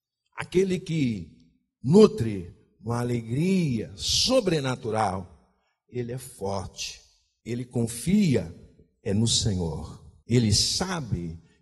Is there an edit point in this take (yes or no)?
no